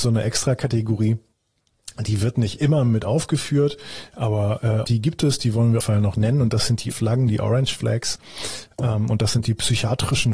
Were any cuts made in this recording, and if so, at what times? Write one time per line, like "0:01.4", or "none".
0:04.8
0:05.8
0:06.9